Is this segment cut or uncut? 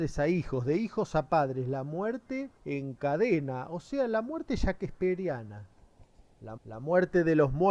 cut